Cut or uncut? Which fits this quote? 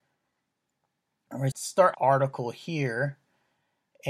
cut